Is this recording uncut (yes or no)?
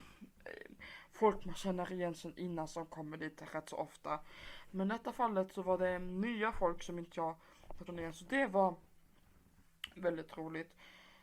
no